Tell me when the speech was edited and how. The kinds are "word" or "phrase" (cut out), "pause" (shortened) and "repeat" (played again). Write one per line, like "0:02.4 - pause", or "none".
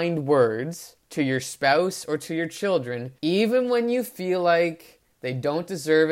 0:01.0 - pause
0:03.2 - pause

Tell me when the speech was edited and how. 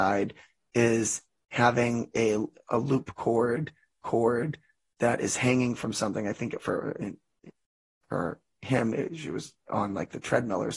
0:04.0 - repeat

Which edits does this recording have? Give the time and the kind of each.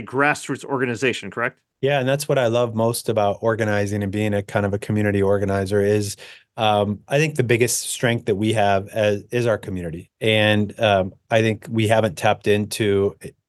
0:01.7 - pause
0:10.1 - pause

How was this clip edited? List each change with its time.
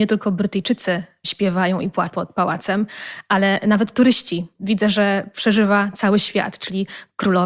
0:02.1 - word

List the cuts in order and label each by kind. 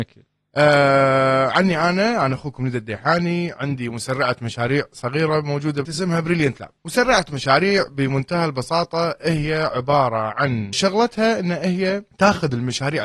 0:05.8 - word
0:10.7 - phrase

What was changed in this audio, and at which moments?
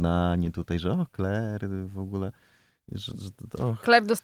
none

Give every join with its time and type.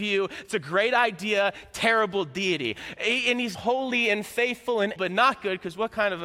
0:03.5 - word
0:05.0 - word

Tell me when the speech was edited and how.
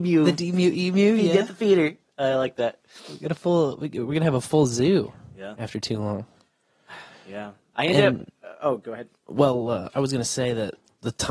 none

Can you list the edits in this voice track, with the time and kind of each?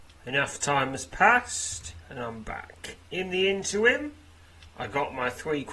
0:03.0 - pause

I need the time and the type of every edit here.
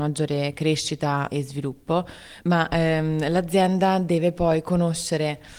0:01.3 - word

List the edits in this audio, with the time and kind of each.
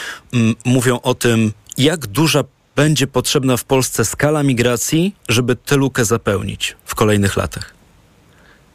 0:05.2 - pause

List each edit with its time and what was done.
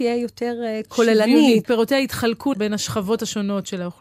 0:01.6 - word
0:02.5 - word

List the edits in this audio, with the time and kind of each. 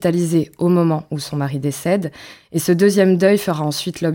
none

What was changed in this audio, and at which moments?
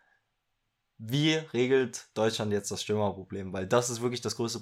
none

